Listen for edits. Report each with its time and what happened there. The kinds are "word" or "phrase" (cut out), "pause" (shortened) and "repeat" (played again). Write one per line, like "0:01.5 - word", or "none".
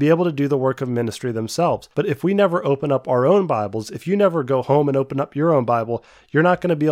0:01.9 - pause

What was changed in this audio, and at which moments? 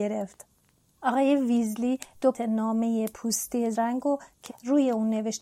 0:02.3 - word
0:03.7 - word
0:04.5 - phrase

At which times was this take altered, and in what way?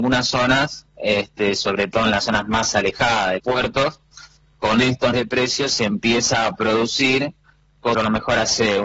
0:03.4 - word
0:05.1 - word
0:07.9 - word

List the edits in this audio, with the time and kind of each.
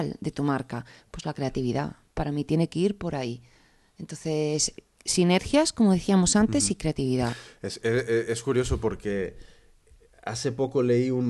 none

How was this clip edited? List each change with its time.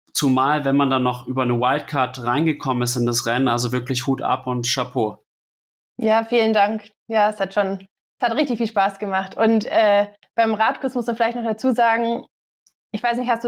none

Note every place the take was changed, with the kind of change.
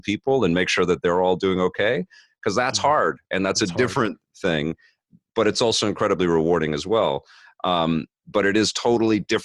none

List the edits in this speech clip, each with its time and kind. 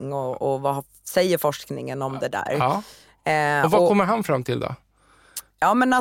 none

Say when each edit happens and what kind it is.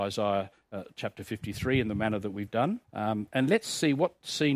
0:02.8 - pause

